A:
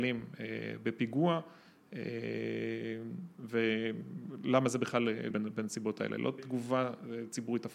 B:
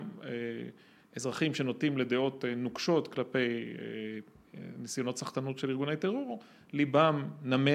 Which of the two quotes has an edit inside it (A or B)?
A